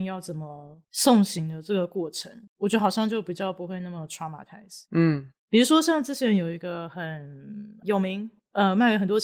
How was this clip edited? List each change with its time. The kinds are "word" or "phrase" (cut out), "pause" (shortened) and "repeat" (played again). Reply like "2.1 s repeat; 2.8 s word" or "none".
2.5 s pause; 4.9 s pause